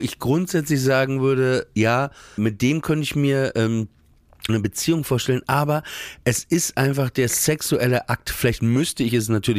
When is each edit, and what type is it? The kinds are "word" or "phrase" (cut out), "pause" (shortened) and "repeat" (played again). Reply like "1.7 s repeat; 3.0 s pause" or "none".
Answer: 2.4 s word; 4.5 s word